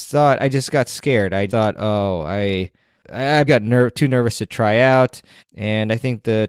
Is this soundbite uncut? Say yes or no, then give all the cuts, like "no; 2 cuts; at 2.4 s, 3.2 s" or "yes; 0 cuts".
no; 3 cuts; at 1.5 s, 3.5 s, 5.4 s